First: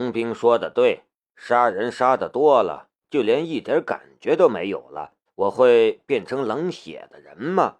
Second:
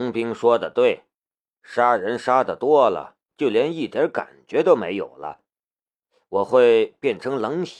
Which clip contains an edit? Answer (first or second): first